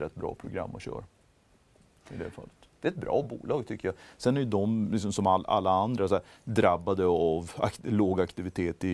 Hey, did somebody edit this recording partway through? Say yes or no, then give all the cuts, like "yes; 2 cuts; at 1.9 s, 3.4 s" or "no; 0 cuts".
no; 0 cuts